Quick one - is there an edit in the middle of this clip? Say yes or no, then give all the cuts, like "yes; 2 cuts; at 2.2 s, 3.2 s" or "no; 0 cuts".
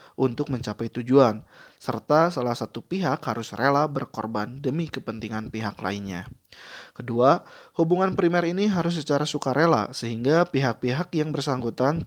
no; 0 cuts